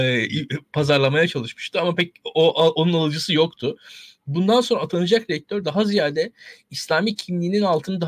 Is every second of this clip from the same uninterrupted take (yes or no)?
yes